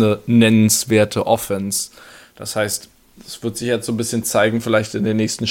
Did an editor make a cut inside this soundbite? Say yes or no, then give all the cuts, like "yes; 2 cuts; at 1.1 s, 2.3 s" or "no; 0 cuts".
no; 0 cuts